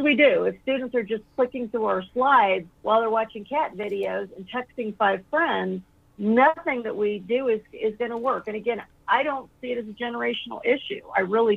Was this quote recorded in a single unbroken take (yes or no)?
no